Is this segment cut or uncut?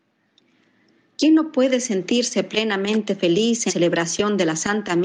cut